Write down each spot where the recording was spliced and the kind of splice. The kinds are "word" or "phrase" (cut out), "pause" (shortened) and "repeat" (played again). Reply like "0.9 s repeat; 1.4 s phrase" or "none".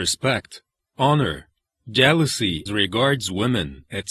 2.7 s word